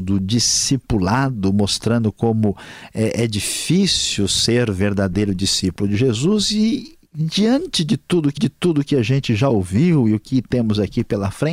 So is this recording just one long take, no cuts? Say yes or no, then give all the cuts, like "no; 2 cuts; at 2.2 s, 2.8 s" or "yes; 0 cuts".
no; 1 cut; at 8.4 s